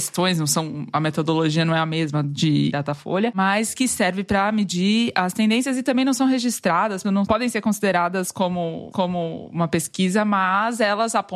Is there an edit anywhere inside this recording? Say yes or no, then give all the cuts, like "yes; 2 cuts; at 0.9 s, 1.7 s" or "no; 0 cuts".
yes; 3 cuts; at 2.7 s, 7.0 s, 8.9 s